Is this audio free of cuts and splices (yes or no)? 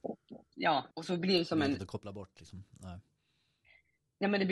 no